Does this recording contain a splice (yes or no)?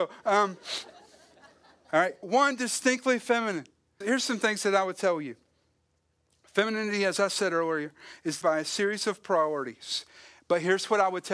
yes